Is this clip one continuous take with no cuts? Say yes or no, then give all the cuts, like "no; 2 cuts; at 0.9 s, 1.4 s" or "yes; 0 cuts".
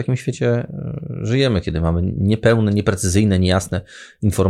yes; 0 cuts